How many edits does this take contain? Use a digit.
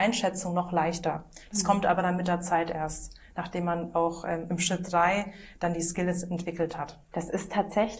1